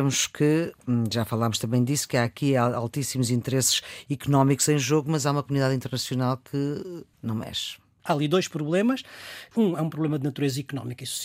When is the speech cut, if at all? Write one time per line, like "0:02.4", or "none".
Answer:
none